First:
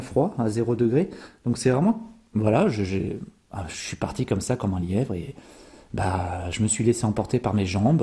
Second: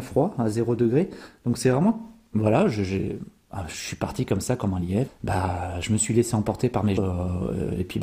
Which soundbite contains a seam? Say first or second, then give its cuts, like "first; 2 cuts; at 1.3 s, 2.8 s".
second; 2 cuts; at 5.1 s, 7.0 s